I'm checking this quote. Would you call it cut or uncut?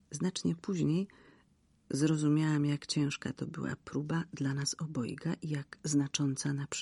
uncut